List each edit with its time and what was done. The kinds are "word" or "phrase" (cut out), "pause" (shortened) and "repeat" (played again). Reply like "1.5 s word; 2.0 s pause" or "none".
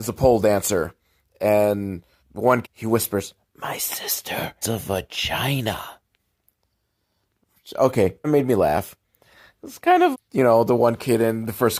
2.2 s pause; 2.6 s word; 4.6 s word; 8.2 s word; 10.1 s word